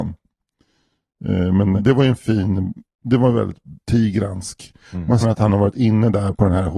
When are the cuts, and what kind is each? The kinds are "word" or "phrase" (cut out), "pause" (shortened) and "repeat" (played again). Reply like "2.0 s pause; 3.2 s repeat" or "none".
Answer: 1.8 s word; 3.8 s pause; 5.2 s word